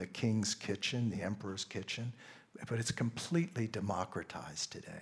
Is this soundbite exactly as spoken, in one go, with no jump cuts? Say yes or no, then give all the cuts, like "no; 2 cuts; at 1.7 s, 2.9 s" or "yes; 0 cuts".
yes; 0 cuts